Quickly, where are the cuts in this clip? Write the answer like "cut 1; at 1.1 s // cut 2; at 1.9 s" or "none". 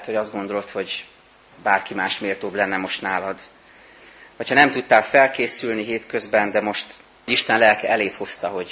cut 1; at 7.3 s